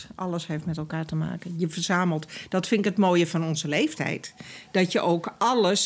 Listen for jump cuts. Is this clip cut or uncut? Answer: uncut